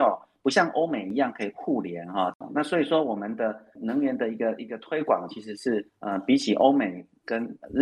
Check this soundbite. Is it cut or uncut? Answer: cut